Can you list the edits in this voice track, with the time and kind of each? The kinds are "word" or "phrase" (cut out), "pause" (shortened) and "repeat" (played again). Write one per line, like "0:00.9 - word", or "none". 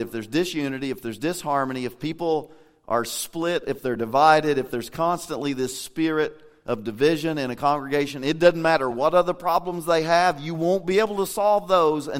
none